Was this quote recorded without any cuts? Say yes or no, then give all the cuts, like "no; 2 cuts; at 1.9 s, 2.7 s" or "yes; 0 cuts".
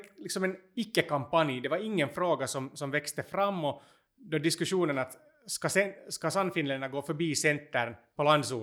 yes; 0 cuts